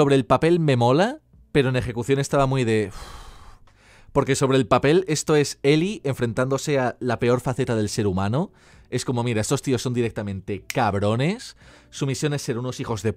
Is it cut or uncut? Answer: uncut